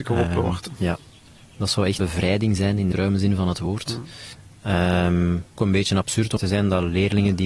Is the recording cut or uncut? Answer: cut